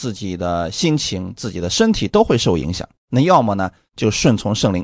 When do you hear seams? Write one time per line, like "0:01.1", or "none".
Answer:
0:03.0